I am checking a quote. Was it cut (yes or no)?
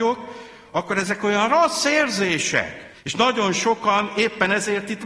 yes